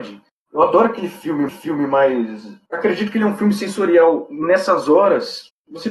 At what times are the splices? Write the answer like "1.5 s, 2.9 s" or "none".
1.5 s